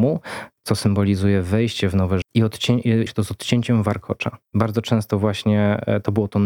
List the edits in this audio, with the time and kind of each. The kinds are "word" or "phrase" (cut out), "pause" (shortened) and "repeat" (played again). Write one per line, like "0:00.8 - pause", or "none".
0:02.2 - word
0:03.1 - phrase
0:04.5 - pause

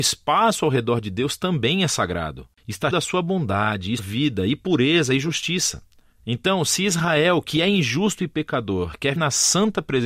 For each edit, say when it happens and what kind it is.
0:02.9 - word
0:04.0 - word
0:09.2 - word

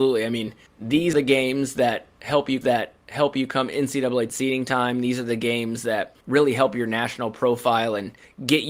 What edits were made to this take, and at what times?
0:01.1 - word
0:02.6 - repeat
0:04.3 - word
0:06.2 - pause

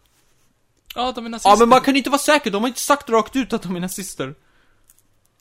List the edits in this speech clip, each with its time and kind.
none

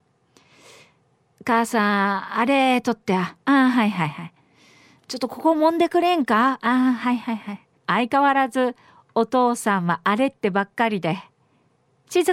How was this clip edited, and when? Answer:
0:07.8 - pause

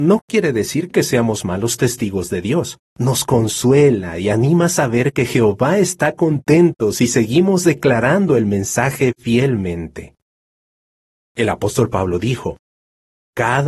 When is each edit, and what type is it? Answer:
0:02.8 - pause

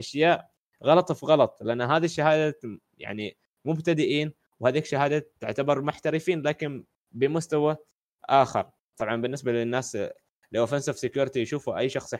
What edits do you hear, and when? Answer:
none

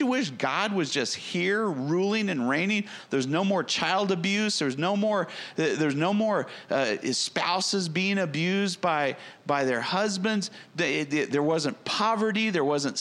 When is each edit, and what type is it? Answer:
none

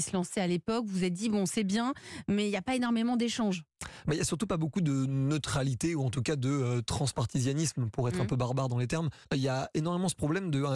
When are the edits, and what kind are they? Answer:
0:09.2 - pause

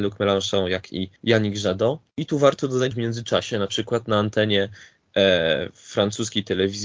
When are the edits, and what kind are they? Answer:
0:01.2 - pause
0:02.1 - pause
0:02.9 - word

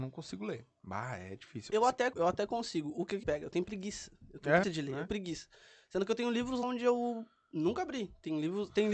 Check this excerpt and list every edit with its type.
0:02.1 - word
0:03.2 - word
0:04.6 - word
0:05.1 - word
0:06.6 - word

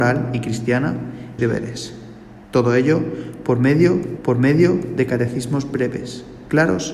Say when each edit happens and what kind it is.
0:01.4 - phrase
0:02.4 - pause
0:04.2 - repeat

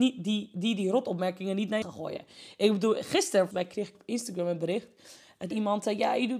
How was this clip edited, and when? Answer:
0:01.8 - word
0:03.5 - word
0:03.9 - word
0:05.5 - word

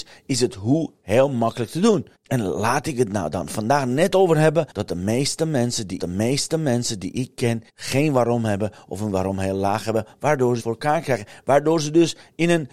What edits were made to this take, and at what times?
0:02.1 - pause
0:04.7 - pause
0:06.0 - repeat
0:07.7 - pause
0:10.6 - phrase

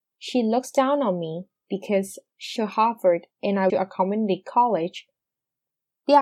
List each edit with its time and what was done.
0:01.6 - pause
0:02.6 - word
0:03.3 - pause
0:03.7 - word

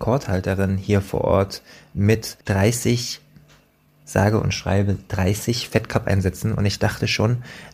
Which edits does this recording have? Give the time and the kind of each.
0:02.4 - pause

